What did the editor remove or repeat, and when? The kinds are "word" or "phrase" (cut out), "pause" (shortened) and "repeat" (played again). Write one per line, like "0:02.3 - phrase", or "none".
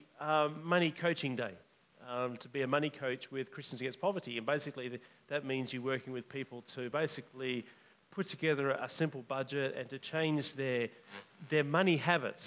none